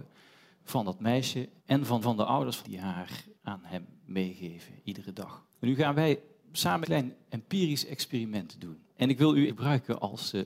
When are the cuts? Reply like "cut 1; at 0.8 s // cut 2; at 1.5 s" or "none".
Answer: cut 1; at 1.6 s // cut 2; at 2.0 s // cut 3; at 2.6 s // cut 4; at 3.3 s // cut 5; at 5.5 s // cut 6; at 6.8 s // cut 7; at 8.9 s // cut 8; at 9.5 s